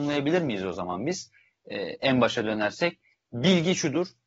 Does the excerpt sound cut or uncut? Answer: uncut